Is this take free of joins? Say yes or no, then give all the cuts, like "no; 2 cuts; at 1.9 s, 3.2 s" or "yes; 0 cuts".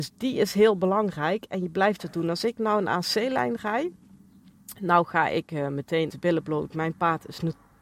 no; 1 cut; at 6.1 s